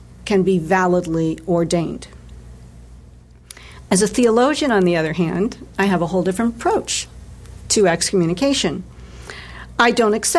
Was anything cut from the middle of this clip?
no; 0 cuts

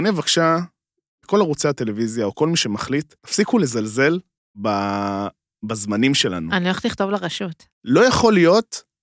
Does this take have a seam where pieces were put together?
yes; 3 cuts; at 3.2 s, 4.4 s, 7.7 s

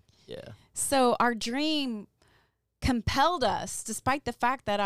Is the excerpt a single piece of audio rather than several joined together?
yes; 0 cuts

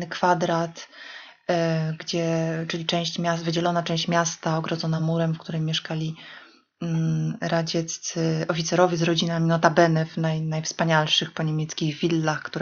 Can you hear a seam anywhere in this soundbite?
no; 0 cuts

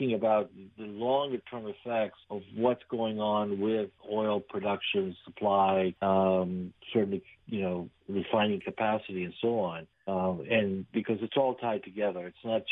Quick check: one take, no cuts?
no; 4 cuts; at 2.2 s, 4.0 s, 6.0 s, 9.9 s

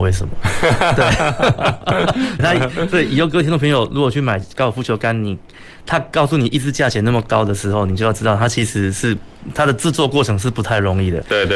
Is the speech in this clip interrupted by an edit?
yes; 1 cut; at 2.4 s

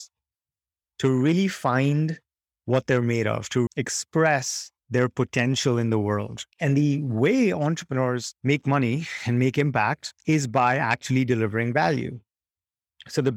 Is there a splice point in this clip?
yes; 4 cuts; at 3.7 s, 4.8 s, 6.5 s, 8.4 s

